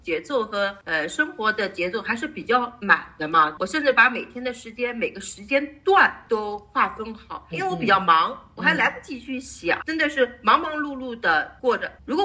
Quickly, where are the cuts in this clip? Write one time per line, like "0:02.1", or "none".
0:07.5
0:09.8